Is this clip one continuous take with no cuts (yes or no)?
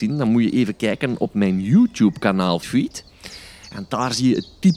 no